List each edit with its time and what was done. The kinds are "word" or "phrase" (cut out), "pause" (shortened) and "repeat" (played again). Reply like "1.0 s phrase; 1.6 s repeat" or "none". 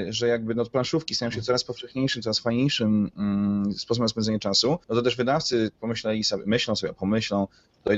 4.8 s pause